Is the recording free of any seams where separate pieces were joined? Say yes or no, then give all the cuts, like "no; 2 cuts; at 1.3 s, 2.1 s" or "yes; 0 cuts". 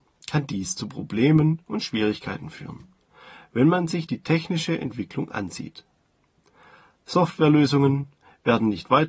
yes; 0 cuts